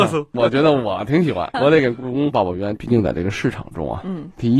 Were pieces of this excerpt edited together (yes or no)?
yes